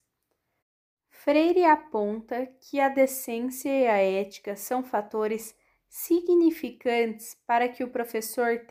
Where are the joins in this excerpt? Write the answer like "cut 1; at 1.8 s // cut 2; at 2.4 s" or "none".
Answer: none